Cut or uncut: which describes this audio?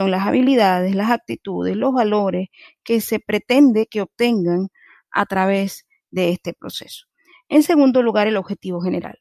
uncut